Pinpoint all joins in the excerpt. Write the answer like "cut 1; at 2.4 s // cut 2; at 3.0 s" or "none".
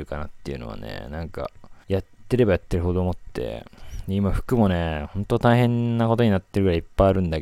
cut 1; at 1.8 s